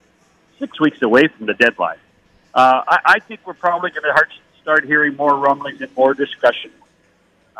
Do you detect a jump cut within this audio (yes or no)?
no